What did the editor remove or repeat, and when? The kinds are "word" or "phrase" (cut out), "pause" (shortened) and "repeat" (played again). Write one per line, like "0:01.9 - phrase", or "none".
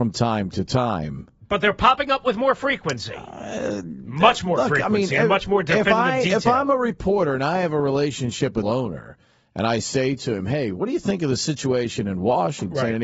0:08.6 - phrase